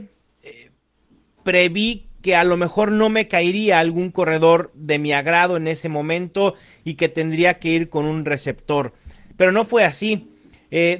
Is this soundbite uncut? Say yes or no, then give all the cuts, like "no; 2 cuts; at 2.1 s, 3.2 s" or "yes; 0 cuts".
yes; 0 cuts